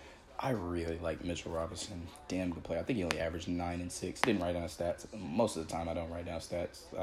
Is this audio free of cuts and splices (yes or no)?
yes